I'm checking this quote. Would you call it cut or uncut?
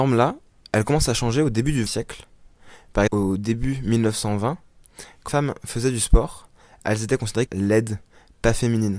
cut